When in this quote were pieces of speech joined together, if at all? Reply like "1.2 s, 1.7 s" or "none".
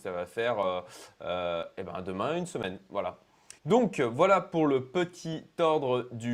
3.6 s